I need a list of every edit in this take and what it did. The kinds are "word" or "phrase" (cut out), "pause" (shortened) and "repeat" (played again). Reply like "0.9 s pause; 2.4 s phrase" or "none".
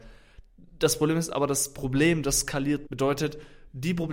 2.9 s word

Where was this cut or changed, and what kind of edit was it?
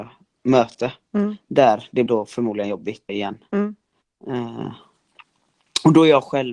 2.1 s word; 3.1 s word

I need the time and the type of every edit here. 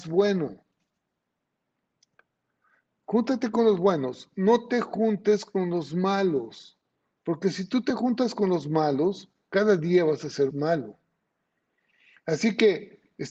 10.5 s word

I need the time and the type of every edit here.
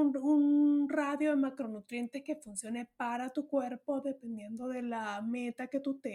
none

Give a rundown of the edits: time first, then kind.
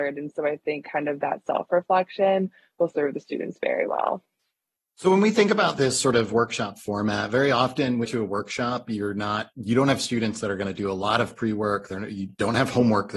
8.0 s phrase; 9.5 s pause

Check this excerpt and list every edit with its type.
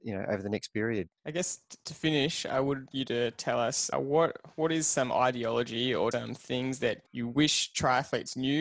1.2 s pause; 2.9 s word; 3.9 s word; 6.1 s word; 7.1 s pause

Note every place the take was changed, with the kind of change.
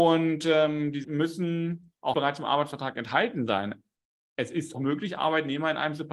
1.0 s word; 2.1 s word; 4.7 s word

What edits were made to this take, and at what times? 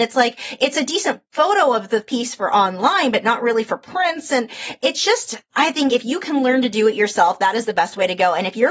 none

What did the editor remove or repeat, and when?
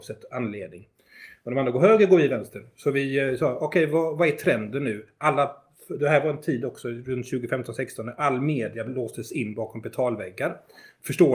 none

